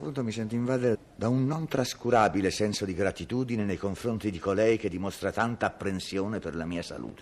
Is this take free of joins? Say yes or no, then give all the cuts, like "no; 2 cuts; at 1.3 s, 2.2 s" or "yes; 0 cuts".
no; 1 cut; at 0.9 s